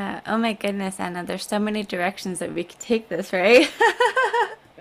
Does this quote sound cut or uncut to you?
uncut